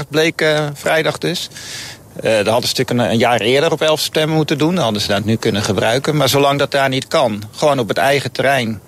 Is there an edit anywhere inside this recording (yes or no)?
no